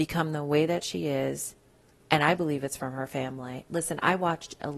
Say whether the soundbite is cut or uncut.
uncut